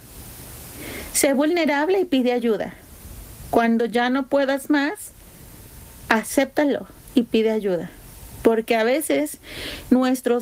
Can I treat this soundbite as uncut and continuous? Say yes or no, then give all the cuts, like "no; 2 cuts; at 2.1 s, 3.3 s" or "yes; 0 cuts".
yes; 0 cuts